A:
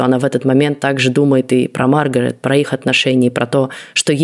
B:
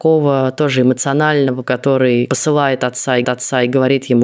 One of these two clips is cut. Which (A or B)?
B